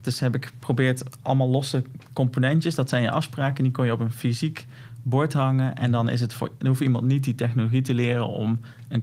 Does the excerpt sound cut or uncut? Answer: uncut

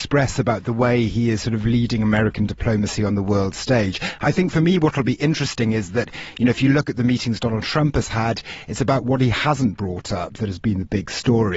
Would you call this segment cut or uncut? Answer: uncut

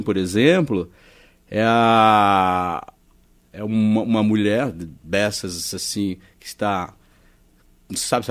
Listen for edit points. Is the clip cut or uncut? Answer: uncut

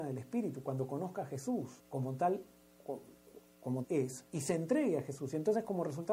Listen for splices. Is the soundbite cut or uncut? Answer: cut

